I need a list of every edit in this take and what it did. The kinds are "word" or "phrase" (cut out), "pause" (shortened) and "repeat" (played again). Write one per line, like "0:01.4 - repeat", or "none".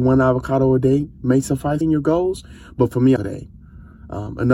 0:01.8 - phrase
0:03.2 - phrase